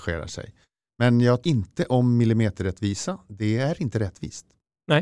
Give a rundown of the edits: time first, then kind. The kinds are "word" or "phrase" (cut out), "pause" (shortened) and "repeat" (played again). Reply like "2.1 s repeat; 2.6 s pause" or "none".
1.4 s word